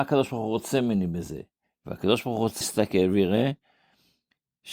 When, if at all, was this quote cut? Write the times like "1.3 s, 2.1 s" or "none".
2.6 s